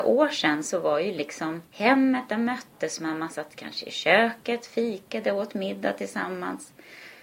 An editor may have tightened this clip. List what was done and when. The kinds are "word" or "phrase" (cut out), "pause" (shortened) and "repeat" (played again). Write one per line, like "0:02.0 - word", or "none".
0:01.7 - pause